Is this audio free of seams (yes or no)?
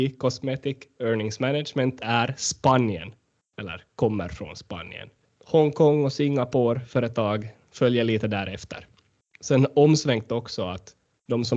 yes